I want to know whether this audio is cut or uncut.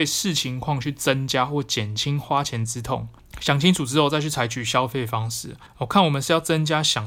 uncut